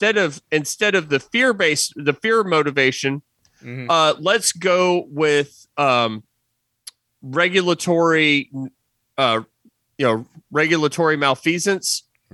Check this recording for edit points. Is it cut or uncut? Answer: uncut